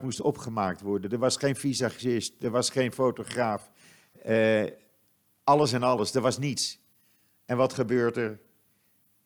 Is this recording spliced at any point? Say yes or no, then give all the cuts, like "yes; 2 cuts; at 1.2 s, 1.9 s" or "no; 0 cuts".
no; 0 cuts